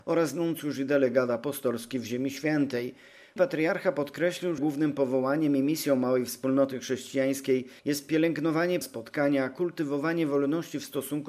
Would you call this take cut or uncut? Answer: cut